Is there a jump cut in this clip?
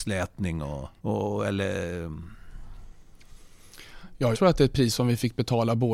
yes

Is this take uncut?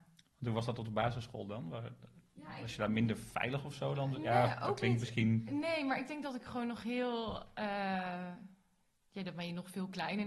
yes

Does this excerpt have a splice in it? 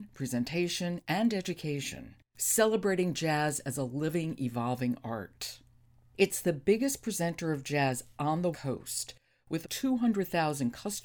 yes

